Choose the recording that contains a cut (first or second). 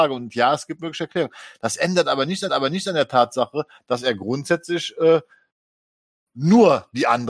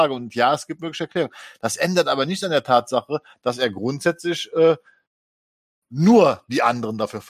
first